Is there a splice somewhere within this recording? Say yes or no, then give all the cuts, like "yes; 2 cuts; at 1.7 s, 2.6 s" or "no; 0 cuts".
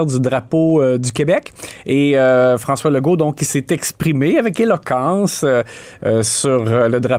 no; 0 cuts